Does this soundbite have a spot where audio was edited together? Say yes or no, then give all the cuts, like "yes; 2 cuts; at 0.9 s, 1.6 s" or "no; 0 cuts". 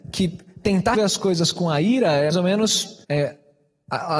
yes; 3 cuts; at 0.9 s, 2.3 s, 3.0 s